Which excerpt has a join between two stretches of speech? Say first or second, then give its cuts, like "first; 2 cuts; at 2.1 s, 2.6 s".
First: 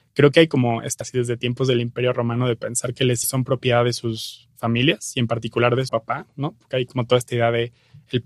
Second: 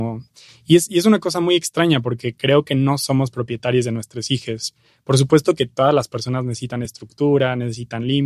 first; 3 cuts; at 1.0 s, 3.2 s, 5.9 s